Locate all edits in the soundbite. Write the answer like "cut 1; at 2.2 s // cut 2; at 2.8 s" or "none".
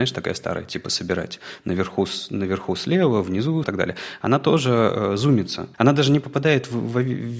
cut 1; at 3.6 s // cut 2; at 5.7 s